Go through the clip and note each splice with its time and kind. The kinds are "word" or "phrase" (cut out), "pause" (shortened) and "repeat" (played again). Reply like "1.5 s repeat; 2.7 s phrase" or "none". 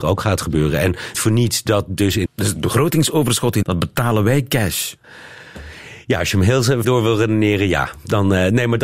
1.1 s word; 2.3 s word; 3.6 s word; 6.8 s word